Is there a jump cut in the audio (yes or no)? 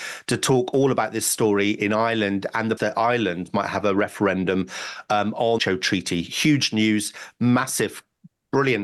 yes